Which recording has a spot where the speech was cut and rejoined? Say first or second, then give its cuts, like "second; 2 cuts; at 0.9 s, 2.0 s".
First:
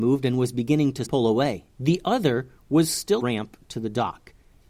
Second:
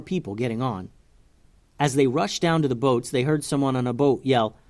first; 3 cuts; at 1.0 s, 1.7 s, 3.2 s